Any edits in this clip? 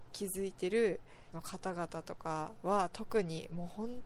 yes; 1 cut; at 1.3 s

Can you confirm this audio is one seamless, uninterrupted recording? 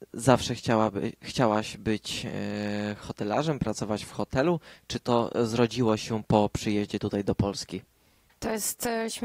yes; 0 cuts

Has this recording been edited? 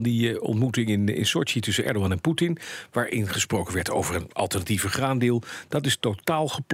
no; 0 cuts

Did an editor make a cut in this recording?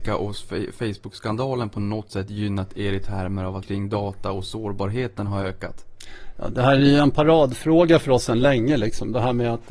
yes; 1 cut; at 3.6 s

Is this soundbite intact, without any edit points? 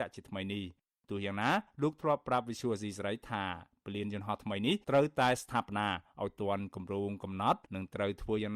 no; 2 cuts; at 4.8 s, 7.6 s

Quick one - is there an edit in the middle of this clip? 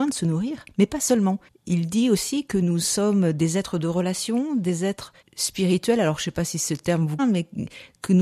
yes; 3 cuts; at 1.5 s, 5.2 s, 7.2 s

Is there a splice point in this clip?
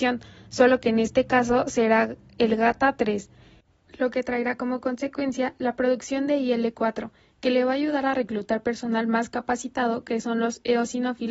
no; 0 cuts

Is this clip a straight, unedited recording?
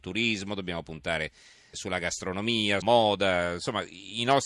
no; 2 cuts; at 1.7 s, 2.8 s

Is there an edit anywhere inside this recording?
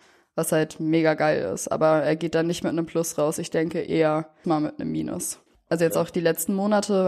yes; 2 cuts; at 4.4 s, 5.5 s

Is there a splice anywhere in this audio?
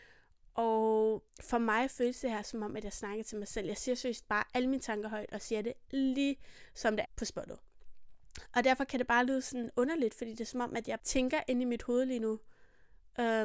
yes; 3 cuts; at 1.3 s, 7.1 s, 11.0 s

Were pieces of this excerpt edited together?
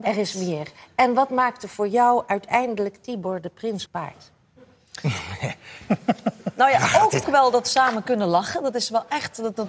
yes; 2 cuts; at 3.9 s, 7.2 s

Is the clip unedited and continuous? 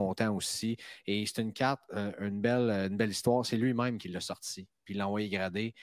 yes; 0 cuts

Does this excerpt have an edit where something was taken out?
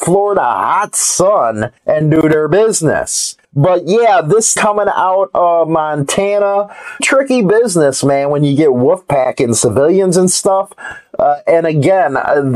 yes; 4 cuts; at 1.8 s, 3.4 s, 4.6 s, 7.0 s

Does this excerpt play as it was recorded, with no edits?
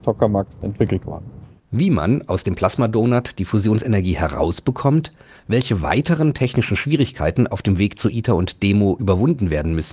yes; 0 cuts

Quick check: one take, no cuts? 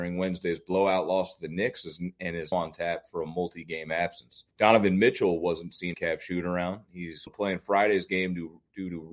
no; 4 cuts; at 2.5 s, 4.5 s, 5.9 s, 7.3 s

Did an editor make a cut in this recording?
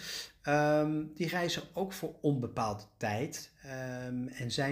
no; 0 cuts

